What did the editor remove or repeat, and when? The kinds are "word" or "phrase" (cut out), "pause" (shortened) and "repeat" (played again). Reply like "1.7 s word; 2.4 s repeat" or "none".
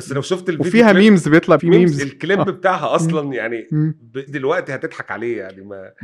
1.6 s word; 4.3 s word